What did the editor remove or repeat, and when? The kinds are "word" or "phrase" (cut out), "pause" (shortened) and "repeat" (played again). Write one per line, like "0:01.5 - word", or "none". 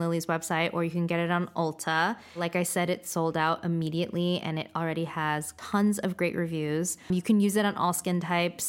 none